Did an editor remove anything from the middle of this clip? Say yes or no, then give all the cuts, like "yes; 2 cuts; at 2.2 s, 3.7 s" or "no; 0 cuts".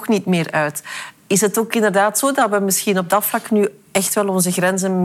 no; 0 cuts